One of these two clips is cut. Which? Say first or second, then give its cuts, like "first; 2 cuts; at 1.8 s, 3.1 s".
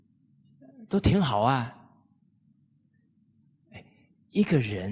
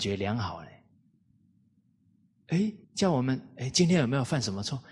second; 1 cut; at 2.8 s